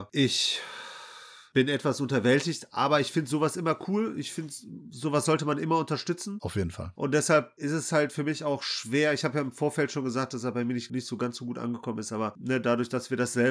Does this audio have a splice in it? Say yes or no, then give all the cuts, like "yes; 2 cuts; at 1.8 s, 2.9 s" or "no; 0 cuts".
no; 0 cuts